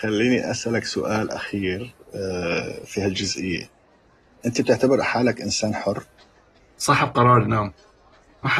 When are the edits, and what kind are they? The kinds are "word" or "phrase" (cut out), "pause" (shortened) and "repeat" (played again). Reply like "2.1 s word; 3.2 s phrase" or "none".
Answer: none

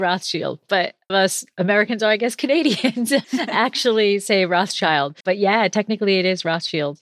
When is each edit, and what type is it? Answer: 1.1 s phrase; 3.2 s word; 5.2 s pause

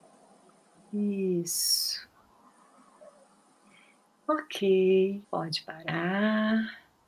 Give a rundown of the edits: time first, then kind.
5.2 s pause

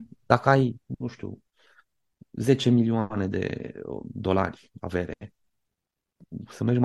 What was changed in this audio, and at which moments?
none

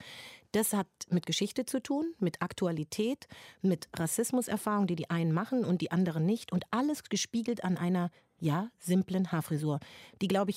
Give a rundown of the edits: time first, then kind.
none

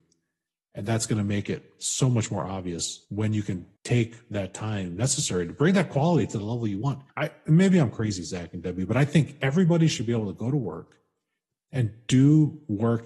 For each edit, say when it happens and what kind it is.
3.0 s pause; 3.8 s pause; 7.1 s pause

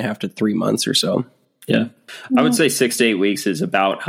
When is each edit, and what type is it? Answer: none

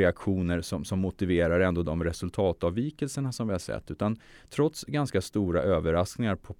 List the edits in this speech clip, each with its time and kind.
none

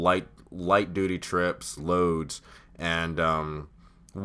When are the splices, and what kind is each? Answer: 1.8 s phrase

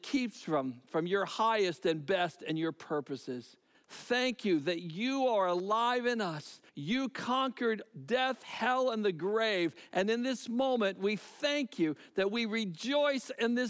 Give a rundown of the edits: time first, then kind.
3.7 s pause; 6.7 s pause

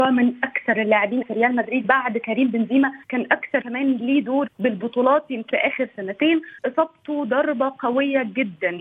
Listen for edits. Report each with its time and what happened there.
1.2 s word; 1.8 s word; 3.0 s pause; 3.6 s word; 4.5 s phrase; 5.5 s word; 6.6 s pause

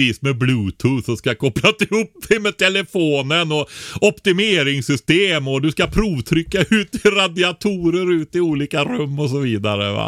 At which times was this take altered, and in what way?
none

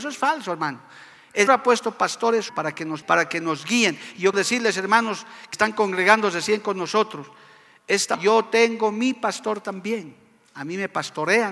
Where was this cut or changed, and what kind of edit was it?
1.5 s word; 2.5 s word; 3.0 s word; 4.3 s word; 5.5 s word; 8.1 s word

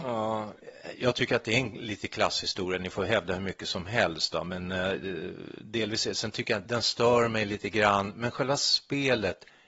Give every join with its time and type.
6.6 s phrase

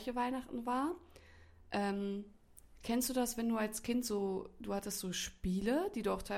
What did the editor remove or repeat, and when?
none

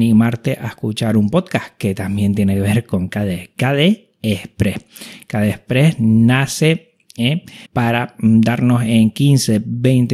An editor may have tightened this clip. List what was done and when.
7.7 s pause

